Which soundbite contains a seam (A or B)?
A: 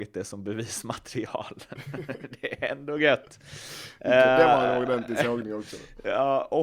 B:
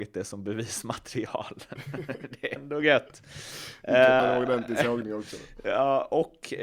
B